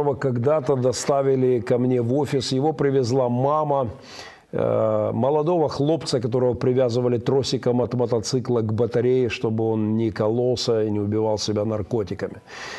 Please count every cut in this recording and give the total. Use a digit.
0